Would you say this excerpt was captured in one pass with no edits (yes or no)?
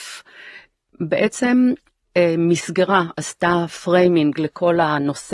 yes